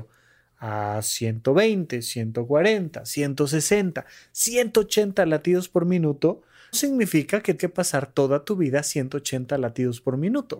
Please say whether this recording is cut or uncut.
cut